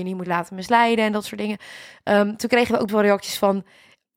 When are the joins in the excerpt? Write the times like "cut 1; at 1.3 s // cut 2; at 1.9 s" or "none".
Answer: cut 1; at 2.9 s